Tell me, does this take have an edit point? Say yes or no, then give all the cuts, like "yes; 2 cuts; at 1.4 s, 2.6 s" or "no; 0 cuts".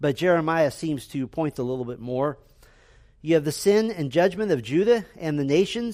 yes; 1 cut; at 1.5 s